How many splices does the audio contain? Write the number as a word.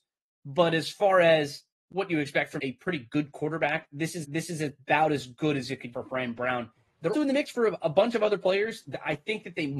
five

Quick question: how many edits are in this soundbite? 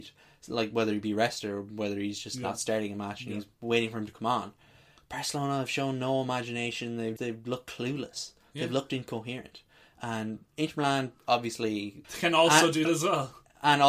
three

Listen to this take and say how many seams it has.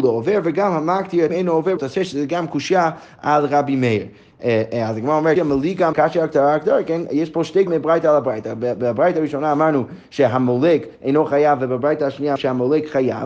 six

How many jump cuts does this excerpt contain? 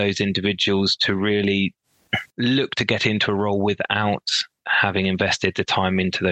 one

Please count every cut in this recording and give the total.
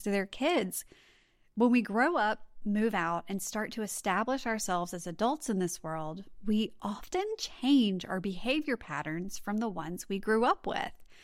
zero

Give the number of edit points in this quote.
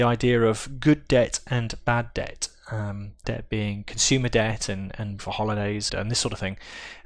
three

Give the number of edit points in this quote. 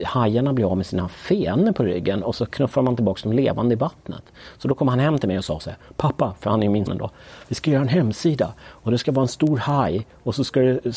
one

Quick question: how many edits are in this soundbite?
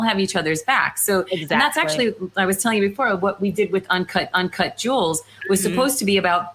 one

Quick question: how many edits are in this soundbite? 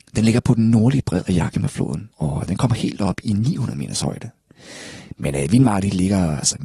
one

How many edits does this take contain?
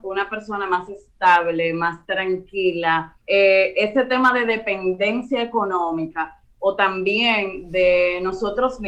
one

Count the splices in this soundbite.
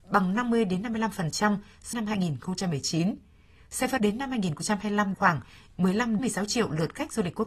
four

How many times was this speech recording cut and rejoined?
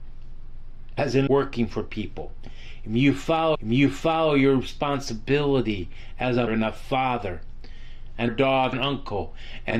five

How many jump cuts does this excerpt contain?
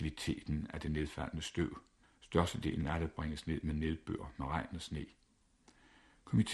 one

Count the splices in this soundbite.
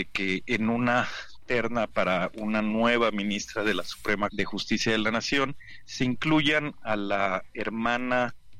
one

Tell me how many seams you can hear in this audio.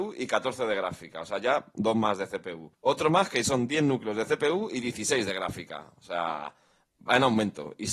one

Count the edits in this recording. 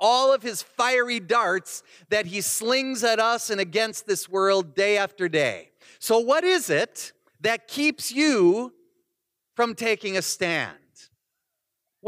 zero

